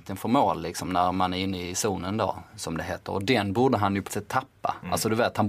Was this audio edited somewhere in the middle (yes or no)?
yes